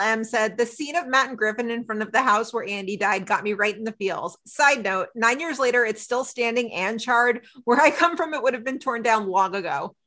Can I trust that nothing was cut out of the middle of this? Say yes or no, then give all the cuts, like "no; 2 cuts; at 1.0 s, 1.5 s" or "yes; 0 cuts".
yes; 0 cuts